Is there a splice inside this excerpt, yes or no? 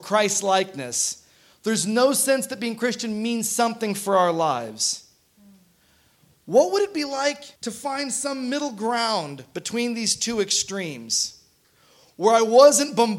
yes